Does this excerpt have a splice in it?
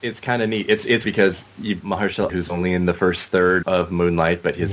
yes; 4 cuts; at 1.0 s, 1.8 s, 2.3 s, 3.6 s

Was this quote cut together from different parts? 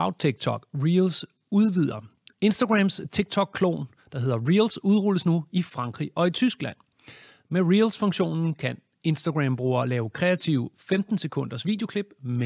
no; 0 cuts

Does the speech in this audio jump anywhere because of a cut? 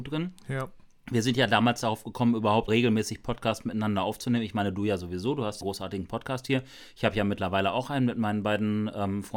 yes; 2 cuts; at 2.7 s, 5.6 s

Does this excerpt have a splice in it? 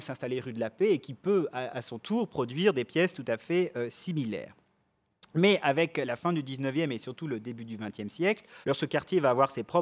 yes; 1 cut; at 8.6 s

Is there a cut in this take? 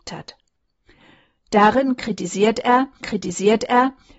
yes; 1 cut; at 3.0 s

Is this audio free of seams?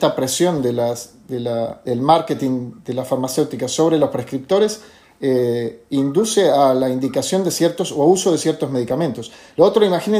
yes; 0 cuts

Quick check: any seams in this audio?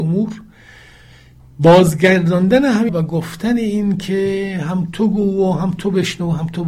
yes; 1 cut; at 2.9 s

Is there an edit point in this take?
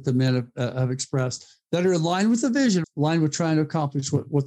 yes; 1 cut; at 2.8 s

